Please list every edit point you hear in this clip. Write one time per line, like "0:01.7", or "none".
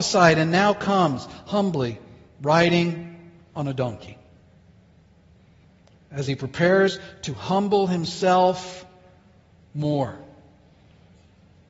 none